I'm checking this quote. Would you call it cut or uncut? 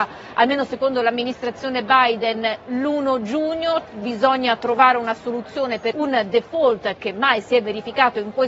cut